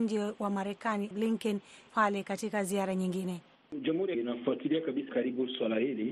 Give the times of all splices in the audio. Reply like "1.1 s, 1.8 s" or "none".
1.1 s, 1.9 s, 4.1 s, 5.1 s